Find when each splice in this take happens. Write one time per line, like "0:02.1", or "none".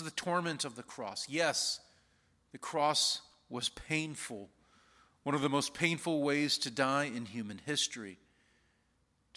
none